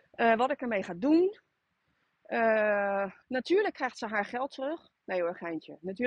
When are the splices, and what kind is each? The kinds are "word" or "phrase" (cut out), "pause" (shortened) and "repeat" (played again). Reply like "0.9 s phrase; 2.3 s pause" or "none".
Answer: 3.2 s pause